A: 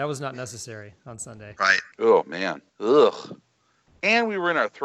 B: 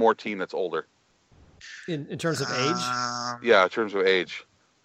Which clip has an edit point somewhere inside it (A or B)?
A